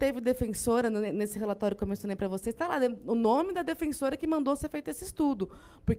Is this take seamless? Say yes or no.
yes